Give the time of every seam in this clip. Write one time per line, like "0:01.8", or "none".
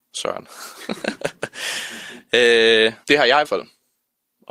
0:03.0
0:03.4